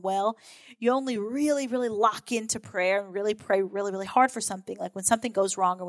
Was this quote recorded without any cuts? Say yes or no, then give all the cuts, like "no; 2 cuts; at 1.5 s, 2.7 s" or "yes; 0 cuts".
yes; 0 cuts